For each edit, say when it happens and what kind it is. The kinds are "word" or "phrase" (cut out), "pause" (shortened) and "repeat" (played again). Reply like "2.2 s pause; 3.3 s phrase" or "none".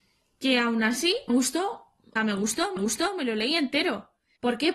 1.3 s word; 2.2 s word; 2.8 s repeat